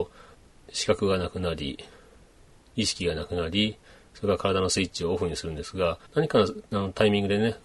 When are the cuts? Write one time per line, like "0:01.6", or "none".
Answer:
0:06.1